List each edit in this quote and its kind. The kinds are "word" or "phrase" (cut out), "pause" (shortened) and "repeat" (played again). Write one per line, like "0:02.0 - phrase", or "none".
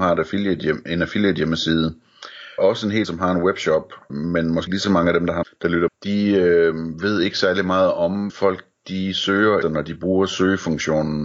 0:02.6 - word
0:03.0 - word
0:04.1 - word
0:04.7 - word
0:05.4 - word
0:05.9 - word
0:08.3 - word
0:09.6 - word